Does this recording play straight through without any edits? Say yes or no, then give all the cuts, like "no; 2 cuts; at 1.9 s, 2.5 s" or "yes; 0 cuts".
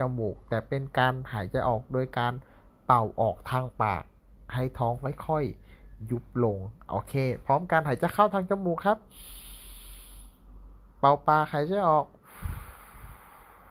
yes; 0 cuts